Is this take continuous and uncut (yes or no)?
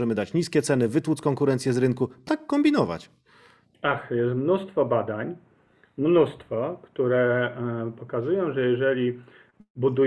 no